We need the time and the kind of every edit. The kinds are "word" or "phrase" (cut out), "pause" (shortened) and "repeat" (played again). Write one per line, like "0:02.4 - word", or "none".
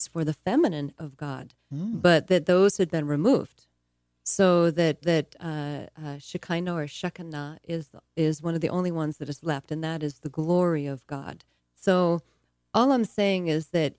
0:00.9 - word
0:05.0 - repeat
0:08.1 - pause
0:11.6 - pause